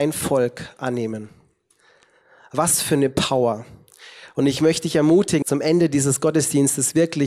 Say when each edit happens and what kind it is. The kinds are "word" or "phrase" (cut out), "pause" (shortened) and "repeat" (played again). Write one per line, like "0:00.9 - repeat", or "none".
0:05.4 - word